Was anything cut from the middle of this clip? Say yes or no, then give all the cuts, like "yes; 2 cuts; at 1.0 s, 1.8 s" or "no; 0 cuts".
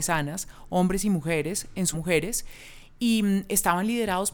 yes; 1 cut; at 1.9 s